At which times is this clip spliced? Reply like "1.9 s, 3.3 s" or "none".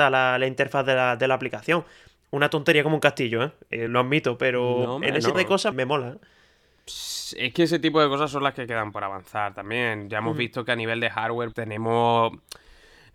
3.9 s, 5.3 s, 5.7 s, 11.5 s